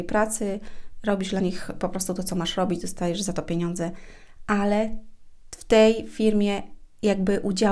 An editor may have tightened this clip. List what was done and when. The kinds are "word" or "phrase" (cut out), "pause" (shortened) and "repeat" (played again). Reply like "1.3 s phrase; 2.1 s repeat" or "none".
none